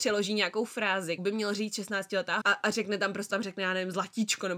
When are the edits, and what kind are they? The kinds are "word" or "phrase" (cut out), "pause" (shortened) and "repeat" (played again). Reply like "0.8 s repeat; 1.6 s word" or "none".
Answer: 1.2 s word; 2.4 s word; 3.3 s word